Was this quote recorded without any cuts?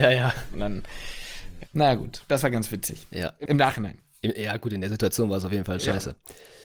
no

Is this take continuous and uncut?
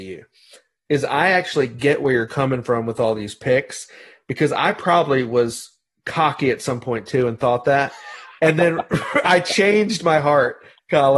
yes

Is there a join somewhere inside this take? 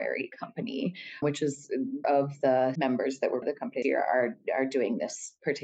yes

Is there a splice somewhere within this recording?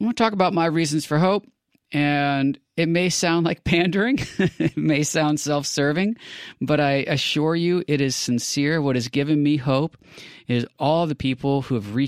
no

